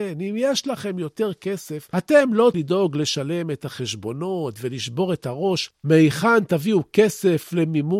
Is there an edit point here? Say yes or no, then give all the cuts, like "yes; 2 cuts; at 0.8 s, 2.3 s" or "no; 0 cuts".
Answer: yes; 1 cut; at 2.5 s